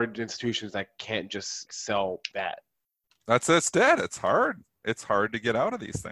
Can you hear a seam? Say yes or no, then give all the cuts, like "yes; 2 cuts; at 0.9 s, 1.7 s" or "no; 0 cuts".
yes; 2 cuts; at 1.7 s, 2.3 s